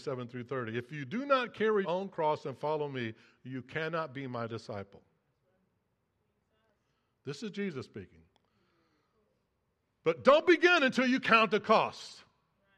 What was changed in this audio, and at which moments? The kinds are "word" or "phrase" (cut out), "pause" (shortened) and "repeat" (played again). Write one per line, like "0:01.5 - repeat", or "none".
0:01.8 - word